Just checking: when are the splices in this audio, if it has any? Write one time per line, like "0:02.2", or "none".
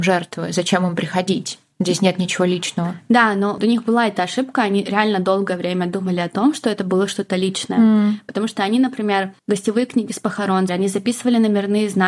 0:03.6
0:09.4
0:10.7